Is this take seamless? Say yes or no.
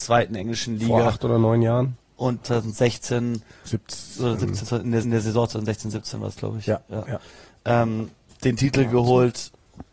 no